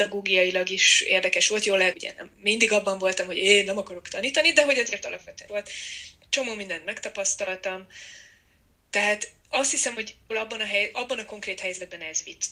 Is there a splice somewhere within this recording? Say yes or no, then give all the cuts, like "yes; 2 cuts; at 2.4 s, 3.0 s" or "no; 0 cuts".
yes; 3 cuts; at 1.9 s, 5.5 s, 10.3 s